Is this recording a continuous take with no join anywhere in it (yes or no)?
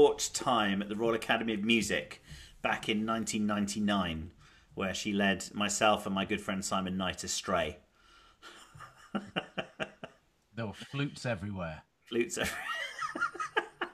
yes